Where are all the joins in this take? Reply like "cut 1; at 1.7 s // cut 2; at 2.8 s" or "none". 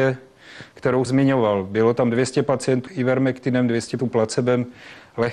cut 1; at 1.1 s // cut 2; at 2.9 s // cut 3; at 4.0 s